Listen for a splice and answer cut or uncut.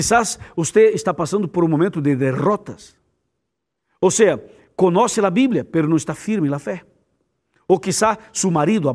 uncut